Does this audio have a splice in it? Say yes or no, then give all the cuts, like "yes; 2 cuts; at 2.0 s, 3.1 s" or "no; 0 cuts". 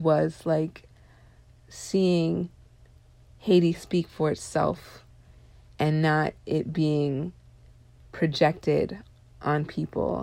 no; 0 cuts